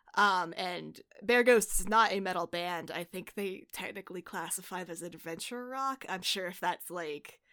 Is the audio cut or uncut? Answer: cut